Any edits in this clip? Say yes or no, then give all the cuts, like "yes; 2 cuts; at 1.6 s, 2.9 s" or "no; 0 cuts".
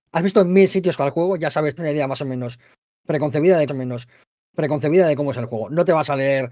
yes; 3 cuts; at 1.0 s, 1.8 s, 3.7 s